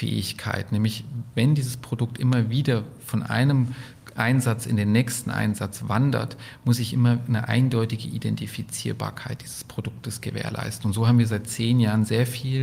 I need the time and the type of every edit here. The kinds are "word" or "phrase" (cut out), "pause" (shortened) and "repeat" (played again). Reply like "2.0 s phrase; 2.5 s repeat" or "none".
none